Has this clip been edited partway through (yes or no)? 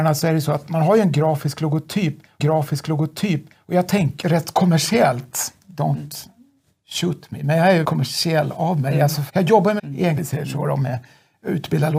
yes